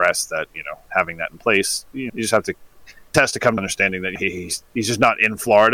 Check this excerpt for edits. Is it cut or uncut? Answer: cut